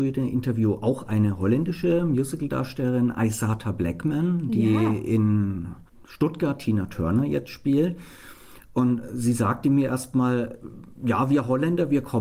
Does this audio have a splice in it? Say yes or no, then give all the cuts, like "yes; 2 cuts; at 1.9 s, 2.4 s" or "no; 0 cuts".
no; 0 cuts